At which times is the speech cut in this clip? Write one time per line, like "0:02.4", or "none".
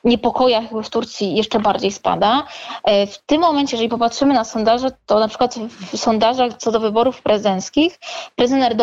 none